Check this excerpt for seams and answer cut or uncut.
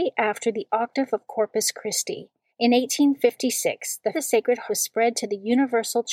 cut